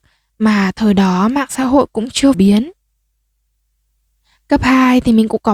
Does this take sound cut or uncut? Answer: cut